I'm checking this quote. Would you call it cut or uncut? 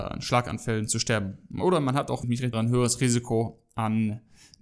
cut